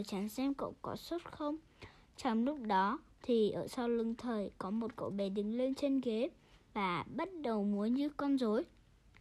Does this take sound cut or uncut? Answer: uncut